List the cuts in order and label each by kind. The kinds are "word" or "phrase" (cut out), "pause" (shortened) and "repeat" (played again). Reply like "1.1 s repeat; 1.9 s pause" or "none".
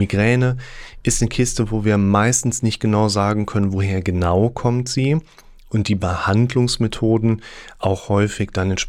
none